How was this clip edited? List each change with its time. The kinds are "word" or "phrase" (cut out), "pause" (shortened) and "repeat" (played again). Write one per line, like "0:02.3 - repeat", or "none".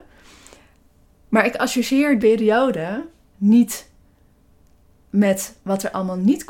0:02.2 - word
0:03.3 - word